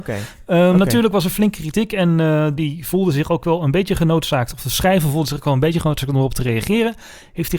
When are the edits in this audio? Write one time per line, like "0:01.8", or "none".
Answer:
0:02.6